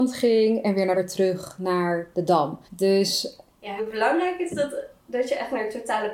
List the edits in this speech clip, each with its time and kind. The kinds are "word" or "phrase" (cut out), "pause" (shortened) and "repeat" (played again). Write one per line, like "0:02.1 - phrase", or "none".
0:00.9 - phrase
0:02.6 - pause
0:03.8 - phrase
0:04.5 - word